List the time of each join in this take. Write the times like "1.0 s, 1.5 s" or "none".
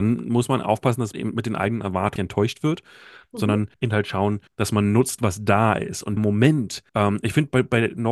1.1 s, 2.2 s, 3.7 s, 4.5 s, 6.2 s, 6.9 s